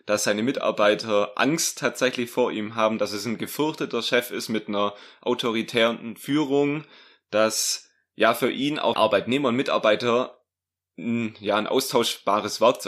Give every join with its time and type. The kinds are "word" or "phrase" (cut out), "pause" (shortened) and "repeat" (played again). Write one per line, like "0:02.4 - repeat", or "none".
0:08.9 - word